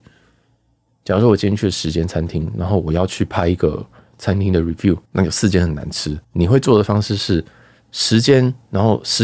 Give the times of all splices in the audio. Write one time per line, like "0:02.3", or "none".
0:05.0
0:06.2